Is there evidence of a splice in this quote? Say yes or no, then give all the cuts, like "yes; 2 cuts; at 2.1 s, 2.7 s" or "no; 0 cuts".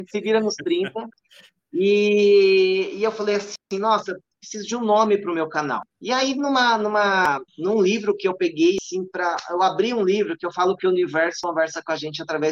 yes; 4 cuts; at 1.1 s, 3.6 s, 5.9 s, 7.5 s